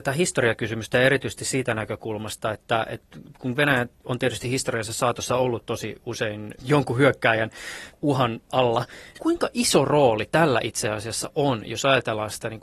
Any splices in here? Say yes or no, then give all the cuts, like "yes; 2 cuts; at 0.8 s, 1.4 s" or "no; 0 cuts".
no; 0 cuts